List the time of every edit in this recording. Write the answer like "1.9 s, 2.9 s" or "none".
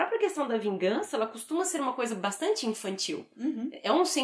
none